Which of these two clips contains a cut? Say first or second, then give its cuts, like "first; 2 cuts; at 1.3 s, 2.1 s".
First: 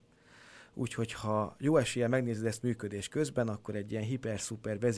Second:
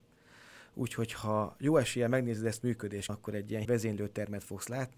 second; 2 cuts; at 3.1 s, 3.6 s